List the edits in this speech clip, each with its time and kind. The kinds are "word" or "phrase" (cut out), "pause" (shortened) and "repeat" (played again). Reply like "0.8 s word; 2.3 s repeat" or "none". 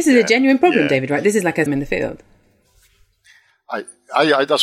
1.7 s phrase